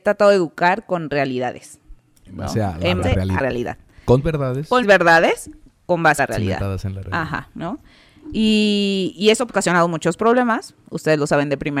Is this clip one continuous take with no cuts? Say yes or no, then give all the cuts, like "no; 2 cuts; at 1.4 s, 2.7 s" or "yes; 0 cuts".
no; 6 cuts; at 3.0 s, 3.4 s, 4.2 s, 4.8 s, 6.2 s, 9.5 s